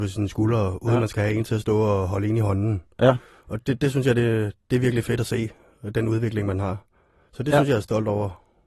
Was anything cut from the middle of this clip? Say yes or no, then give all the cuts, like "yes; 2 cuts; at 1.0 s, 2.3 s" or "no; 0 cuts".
no; 0 cuts